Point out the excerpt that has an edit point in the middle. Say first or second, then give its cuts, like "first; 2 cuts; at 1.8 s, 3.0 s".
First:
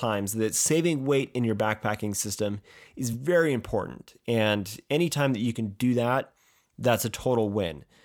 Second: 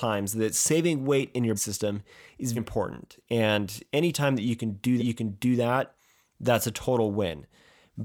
second; 3 cuts; at 1.6 s, 2.6 s, 5.0 s